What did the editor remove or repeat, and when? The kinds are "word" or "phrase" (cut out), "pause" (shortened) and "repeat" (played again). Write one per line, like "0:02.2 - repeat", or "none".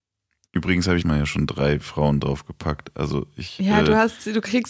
0:01.0 - word